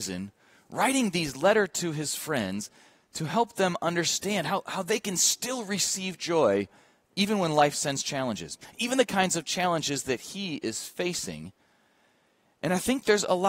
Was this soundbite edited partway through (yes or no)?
no